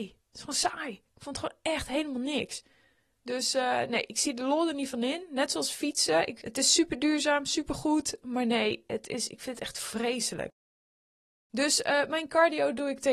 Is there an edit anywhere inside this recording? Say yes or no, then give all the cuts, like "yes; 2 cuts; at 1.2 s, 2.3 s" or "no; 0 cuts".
no; 0 cuts